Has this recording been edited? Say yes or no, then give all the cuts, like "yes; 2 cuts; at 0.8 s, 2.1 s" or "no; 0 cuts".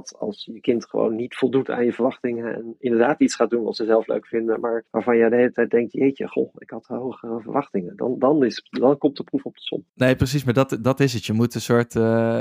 yes; 2 cuts; at 4.9 s, 9.9 s